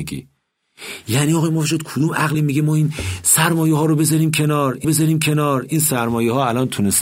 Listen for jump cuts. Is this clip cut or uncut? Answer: cut